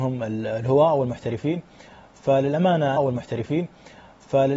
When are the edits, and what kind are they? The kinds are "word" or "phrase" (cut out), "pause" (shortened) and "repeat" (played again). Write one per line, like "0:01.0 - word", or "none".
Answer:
0:03.0 - repeat